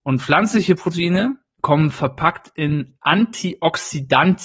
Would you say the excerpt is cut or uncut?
uncut